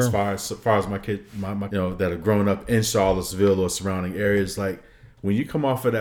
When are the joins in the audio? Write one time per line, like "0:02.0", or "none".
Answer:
0:01.7